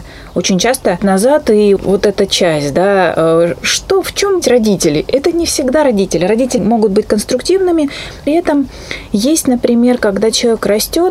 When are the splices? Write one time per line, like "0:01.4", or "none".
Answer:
0:01.0
0:01.8
0:03.6
0:04.4
0:06.6
0:08.3

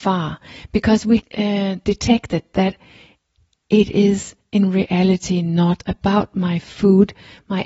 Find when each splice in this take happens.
0:01.2

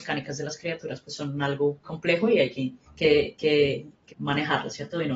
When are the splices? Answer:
0:01.8
0:02.9
0:04.1

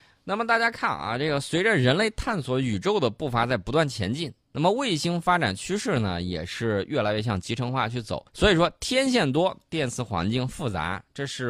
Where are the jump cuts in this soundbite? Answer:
0:08.3

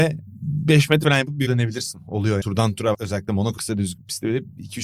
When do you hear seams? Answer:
0:01.0
0:01.5
0:02.4
0:02.9
0:03.6

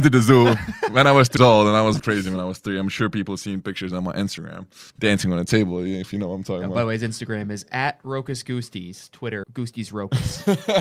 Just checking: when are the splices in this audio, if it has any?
0:01.4
0:02.0
0:04.9
0:09.4

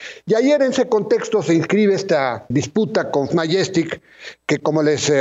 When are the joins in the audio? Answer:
0:02.5
0:03.3

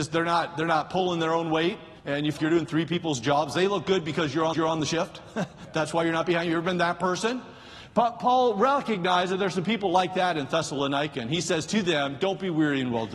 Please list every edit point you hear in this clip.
0:02.0
0:02.4
0:04.5

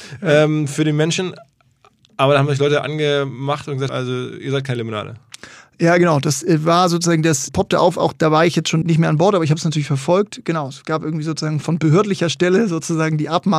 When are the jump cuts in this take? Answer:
0:03.9
0:07.5
0:08.8
0:11.6

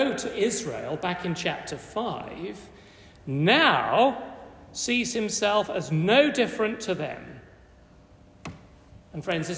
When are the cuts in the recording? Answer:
none

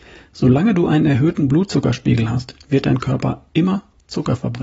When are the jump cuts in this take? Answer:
none

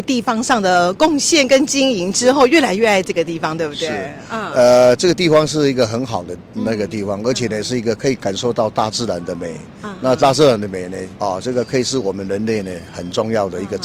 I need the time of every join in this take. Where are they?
0:11.1

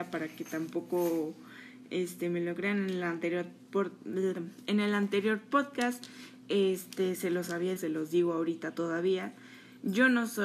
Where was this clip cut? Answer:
0:07.8

